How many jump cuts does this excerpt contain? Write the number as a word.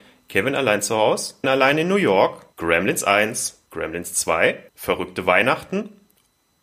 four